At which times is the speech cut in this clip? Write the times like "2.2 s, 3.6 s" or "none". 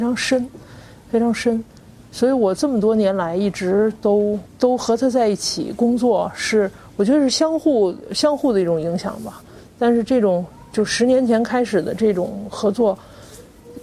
none